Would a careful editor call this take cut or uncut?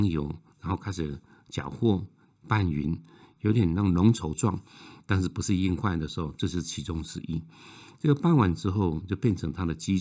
uncut